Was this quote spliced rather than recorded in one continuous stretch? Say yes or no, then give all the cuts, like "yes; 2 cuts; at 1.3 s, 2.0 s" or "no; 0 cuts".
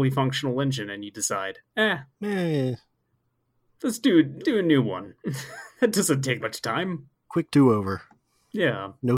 yes; 3 cuts; at 2.1 s, 4.4 s, 6.4 s